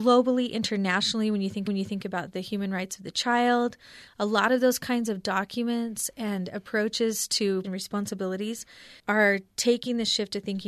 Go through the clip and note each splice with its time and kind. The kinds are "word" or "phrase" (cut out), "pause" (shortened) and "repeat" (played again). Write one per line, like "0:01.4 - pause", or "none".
0:01.7 - repeat
0:07.6 - phrase
0:09.0 - pause